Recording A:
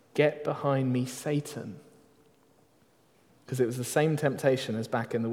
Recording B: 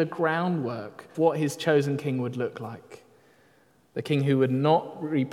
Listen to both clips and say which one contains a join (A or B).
B